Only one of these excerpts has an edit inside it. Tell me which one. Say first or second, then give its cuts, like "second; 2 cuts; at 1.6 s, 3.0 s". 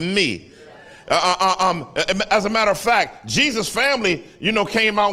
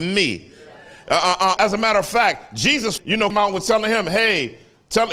second; 3 cuts; at 1.6 s, 3.0 s, 3.3 s